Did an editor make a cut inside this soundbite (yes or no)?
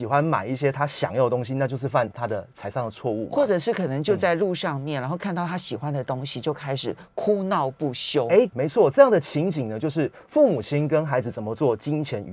yes